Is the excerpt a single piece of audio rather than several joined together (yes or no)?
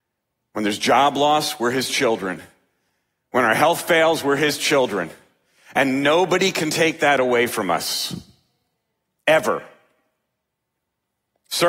yes